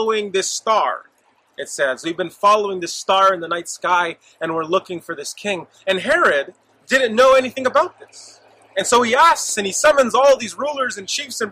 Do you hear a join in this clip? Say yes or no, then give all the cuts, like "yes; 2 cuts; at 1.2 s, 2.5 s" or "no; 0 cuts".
no; 0 cuts